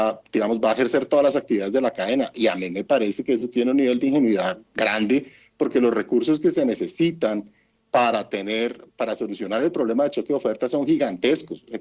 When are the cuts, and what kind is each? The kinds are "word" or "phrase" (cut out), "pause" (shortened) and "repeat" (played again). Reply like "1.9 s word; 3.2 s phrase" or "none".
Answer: none